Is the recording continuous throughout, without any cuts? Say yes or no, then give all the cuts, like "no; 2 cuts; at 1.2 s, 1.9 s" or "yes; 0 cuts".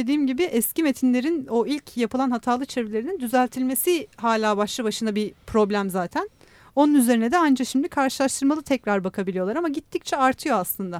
yes; 0 cuts